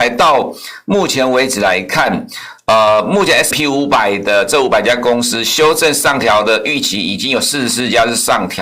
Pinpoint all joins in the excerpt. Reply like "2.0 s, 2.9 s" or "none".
3.5 s